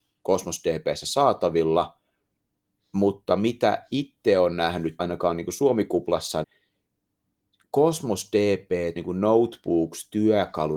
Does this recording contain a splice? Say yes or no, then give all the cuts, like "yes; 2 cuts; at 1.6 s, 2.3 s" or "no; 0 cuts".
yes; 3 cuts; at 5.0 s, 6.4 s, 9.0 s